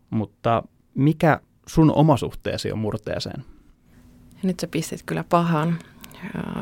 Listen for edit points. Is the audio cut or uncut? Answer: uncut